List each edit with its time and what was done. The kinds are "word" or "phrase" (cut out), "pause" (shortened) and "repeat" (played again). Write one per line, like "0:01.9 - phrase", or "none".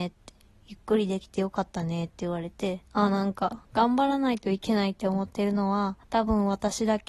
0:02.9 - pause
0:03.6 - pause
0:06.0 - pause